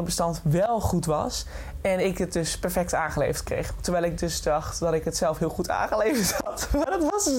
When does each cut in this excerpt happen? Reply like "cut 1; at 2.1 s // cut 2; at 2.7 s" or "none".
none